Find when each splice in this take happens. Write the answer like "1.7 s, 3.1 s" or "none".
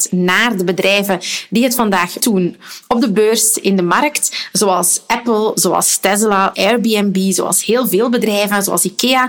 2.2 s, 6.5 s